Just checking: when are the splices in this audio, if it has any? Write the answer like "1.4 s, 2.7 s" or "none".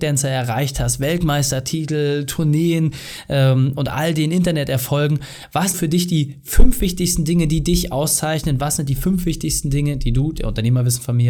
5.7 s

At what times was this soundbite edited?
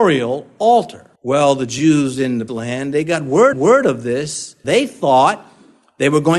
1.2 s, 2.5 s, 3.5 s, 4.6 s

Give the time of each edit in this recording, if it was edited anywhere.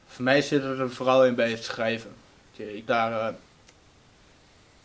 2.4 s, 2.9 s

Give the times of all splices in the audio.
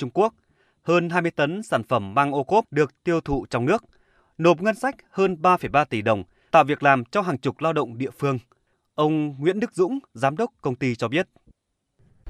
6.5 s

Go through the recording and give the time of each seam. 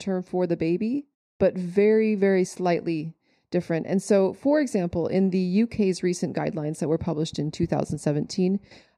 none

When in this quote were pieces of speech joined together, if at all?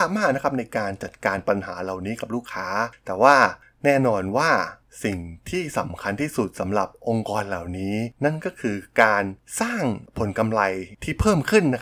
none

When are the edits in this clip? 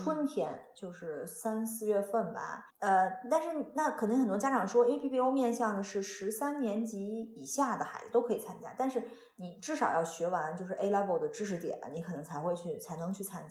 2.7 s

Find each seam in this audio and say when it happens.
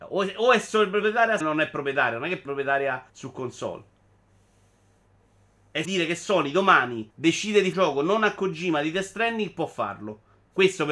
1.4 s, 2.5 s, 3.1 s, 5.8 s, 7.1 s, 7.7 s

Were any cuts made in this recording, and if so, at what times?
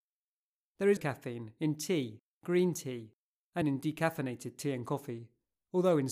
1.0 s, 3.6 s

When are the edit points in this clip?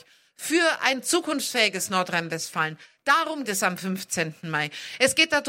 3.5 s

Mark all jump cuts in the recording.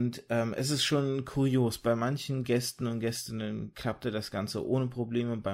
none

